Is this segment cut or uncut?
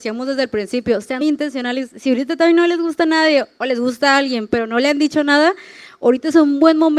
cut